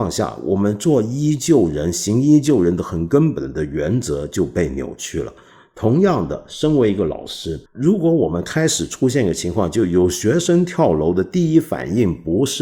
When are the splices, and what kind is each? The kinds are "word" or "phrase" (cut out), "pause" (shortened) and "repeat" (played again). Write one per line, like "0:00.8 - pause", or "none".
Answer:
0:07.7 - pause